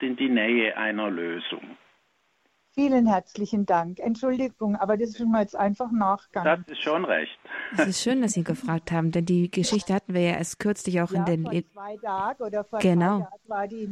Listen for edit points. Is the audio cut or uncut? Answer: uncut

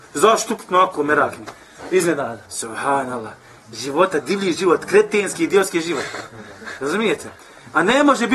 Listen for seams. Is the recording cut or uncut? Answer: cut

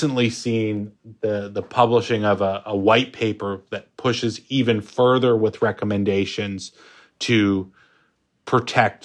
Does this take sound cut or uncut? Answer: uncut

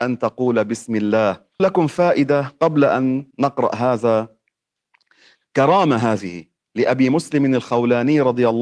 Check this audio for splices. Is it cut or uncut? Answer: cut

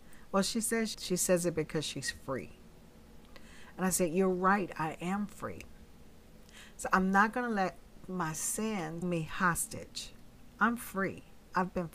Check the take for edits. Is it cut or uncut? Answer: cut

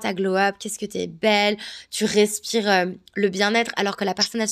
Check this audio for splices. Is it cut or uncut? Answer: uncut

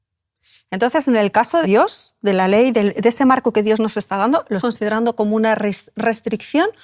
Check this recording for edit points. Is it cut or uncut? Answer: cut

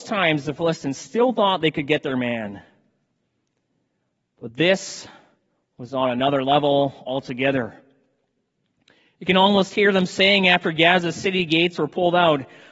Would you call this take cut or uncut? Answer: uncut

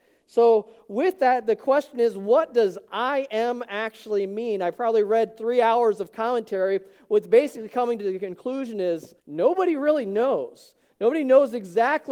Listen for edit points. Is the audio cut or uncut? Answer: cut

